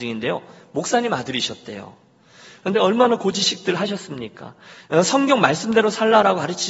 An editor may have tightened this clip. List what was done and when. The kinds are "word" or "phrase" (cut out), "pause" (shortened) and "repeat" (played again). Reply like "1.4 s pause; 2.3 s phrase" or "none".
2.7 s phrase